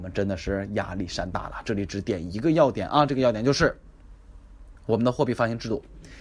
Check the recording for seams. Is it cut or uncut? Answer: cut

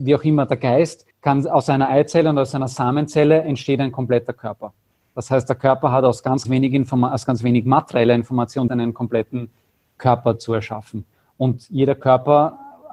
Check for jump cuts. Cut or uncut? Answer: cut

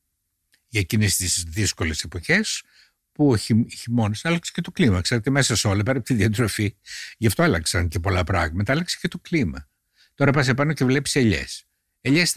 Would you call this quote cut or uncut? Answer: uncut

